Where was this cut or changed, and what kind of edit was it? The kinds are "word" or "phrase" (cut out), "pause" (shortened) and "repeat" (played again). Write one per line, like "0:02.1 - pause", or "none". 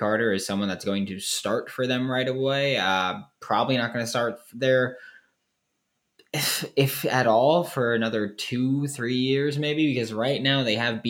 none